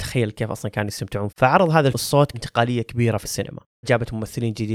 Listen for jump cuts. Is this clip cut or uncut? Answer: cut